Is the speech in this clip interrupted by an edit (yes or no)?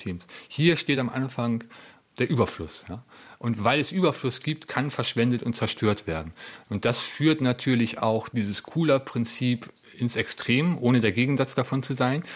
no